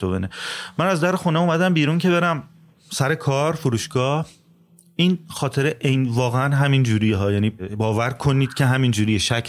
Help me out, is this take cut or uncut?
uncut